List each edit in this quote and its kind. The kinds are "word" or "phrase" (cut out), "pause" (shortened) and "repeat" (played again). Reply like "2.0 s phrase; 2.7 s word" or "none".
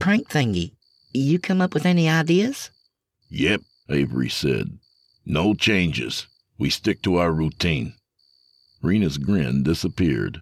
none

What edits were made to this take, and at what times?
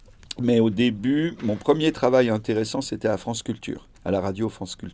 3.9 s pause

